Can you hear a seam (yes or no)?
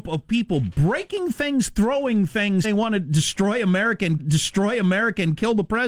yes